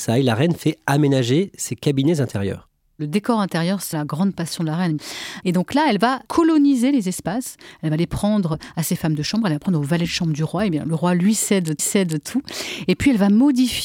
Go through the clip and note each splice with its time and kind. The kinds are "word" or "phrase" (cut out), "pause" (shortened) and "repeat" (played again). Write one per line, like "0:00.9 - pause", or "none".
0:03.9 - word
0:06.3 - pause
0:11.8 - repeat